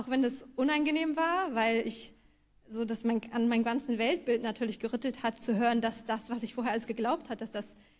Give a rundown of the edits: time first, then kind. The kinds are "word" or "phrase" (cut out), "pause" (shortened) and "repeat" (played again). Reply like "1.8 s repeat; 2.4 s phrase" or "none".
none